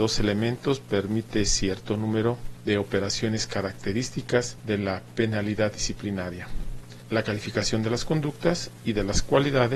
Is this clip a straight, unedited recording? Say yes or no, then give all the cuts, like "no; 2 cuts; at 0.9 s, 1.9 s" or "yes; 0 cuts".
yes; 0 cuts